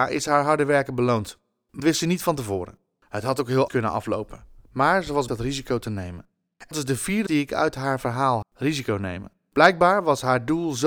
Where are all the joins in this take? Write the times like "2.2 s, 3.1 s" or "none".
1.8 s, 3.7 s, 5.3 s, 6.7 s, 7.3 s, 8.4 s

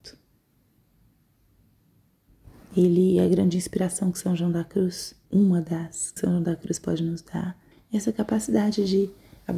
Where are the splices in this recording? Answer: 5.3 s, 6.2 s, 7.7 s

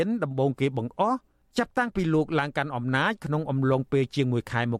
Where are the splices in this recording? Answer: none

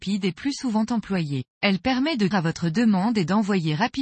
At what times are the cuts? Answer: 1.5 s, 2.3 s

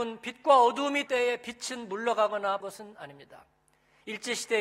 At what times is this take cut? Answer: 1.1 s, 2.6 s

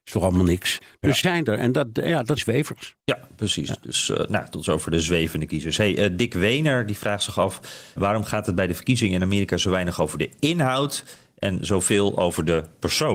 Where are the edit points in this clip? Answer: 1.2 s, 2.4 s, 3.0 s, 8.0 s

